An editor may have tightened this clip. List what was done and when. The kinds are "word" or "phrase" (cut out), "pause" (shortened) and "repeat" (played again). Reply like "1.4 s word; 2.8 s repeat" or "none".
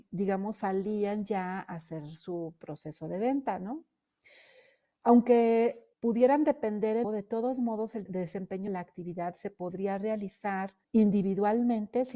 5.9 s pause; 7.0 s phrase; 8.1 s word; 8.7 s word; 10.8 s pause